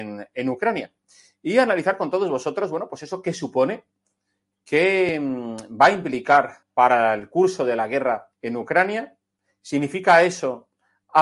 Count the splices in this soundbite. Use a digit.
2